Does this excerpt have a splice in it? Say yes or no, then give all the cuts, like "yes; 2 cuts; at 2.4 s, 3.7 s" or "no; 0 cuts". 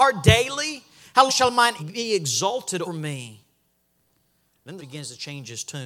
yes; 4 cuts; at 1.3 s, 1.8 s, 2.8 s, 4.8 s